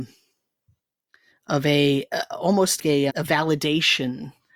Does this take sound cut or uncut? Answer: cut